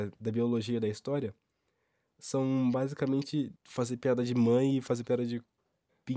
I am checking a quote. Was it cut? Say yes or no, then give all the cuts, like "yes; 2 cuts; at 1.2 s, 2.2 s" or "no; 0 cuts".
yes; 1 cut; at 3.6 s